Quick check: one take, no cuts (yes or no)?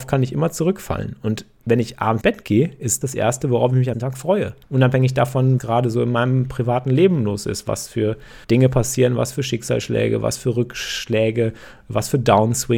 no